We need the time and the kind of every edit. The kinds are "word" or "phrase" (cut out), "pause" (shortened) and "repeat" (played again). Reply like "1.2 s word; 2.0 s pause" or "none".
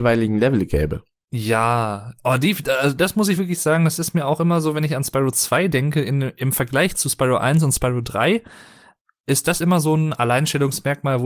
none